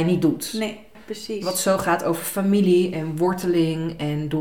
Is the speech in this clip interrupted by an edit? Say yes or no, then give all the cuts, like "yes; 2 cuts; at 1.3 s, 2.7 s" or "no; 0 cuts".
no; 0 cuts